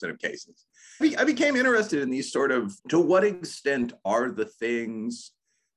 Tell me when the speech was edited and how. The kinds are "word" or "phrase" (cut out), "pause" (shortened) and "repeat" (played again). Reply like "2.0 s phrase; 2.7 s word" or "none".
1.0 s phrase; 2.8 s pause